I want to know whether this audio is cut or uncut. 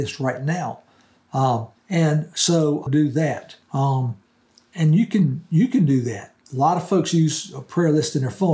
cut